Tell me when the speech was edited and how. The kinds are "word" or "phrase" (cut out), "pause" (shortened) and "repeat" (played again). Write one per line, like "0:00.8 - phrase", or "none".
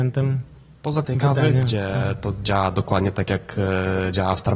0:01.0 - phrase

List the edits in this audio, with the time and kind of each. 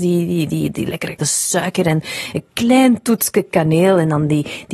0:01.2 - phrase

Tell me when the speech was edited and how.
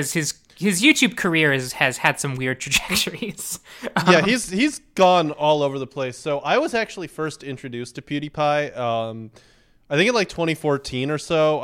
none

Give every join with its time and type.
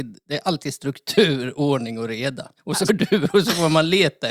0:02.6 - pause
0:02.9 - word

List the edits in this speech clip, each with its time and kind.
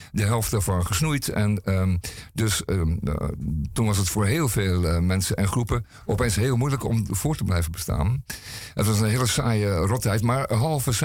none

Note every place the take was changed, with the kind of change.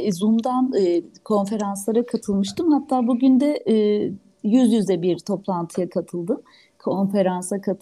none

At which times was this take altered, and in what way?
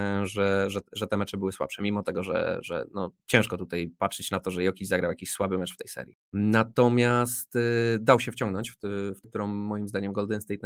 0:03.2 - pause
0:06.2 - pause
0:09.2 - word

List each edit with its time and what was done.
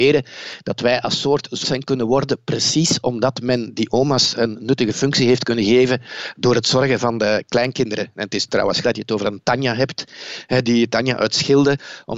0:01.6 - word
0:08.8 - word
0:10.6 - word

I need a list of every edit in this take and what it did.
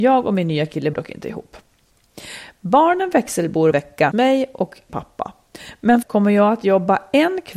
0:00.9 - word
0:03.7 - word
0:04.1 - word
0:04.9 - word
0:06.0 - word

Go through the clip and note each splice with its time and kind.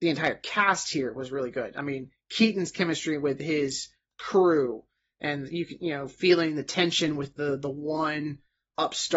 none

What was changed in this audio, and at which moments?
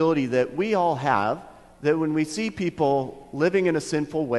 none

